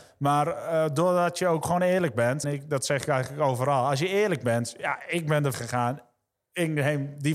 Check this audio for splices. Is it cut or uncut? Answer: cut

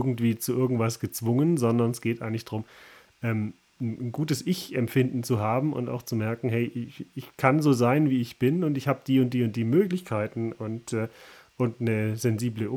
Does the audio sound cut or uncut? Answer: uncut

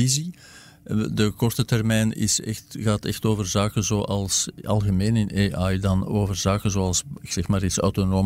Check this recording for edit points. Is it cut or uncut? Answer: uncut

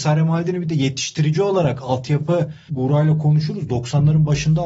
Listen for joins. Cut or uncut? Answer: cut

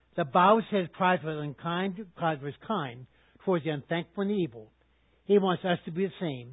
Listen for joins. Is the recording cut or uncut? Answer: uncut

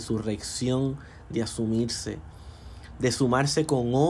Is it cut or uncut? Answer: uncut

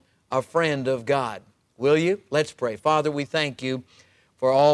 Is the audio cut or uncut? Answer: uncut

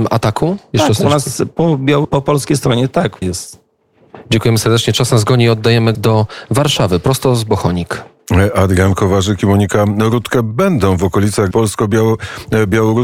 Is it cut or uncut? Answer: cut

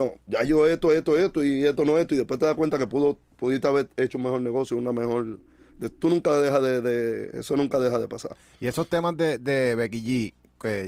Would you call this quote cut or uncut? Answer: uncut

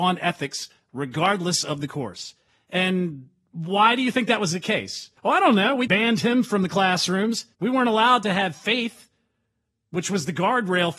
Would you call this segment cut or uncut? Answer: cut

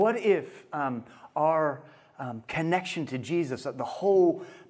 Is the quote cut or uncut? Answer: uncut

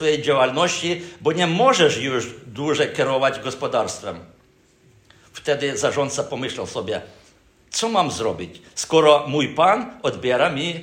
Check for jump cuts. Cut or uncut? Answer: uncut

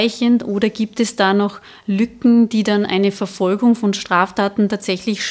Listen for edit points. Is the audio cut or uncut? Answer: uncut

